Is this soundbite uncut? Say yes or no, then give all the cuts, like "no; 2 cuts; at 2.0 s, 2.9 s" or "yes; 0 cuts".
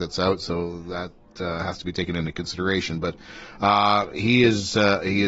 yes; 0 cuts